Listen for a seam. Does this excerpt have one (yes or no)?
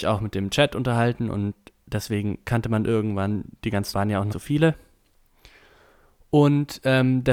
yes